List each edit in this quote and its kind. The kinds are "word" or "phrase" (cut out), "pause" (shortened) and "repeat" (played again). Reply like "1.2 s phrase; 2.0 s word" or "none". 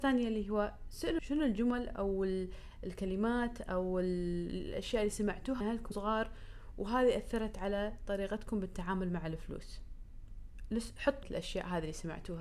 1.2 s word; 5.6 s word; 5.9 s word; 11.2 s word